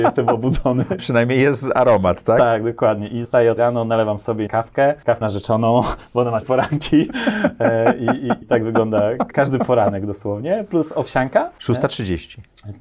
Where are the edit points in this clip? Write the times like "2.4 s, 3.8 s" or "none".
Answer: 1.0 s, 3.2 s, 3.6 s, 4.5 s, 5.2 s, 6.4 s, 8.4 s, 9.3 s